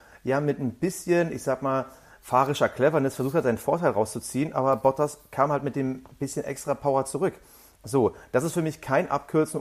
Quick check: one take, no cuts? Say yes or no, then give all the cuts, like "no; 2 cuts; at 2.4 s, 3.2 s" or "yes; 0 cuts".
yes; 0 cuts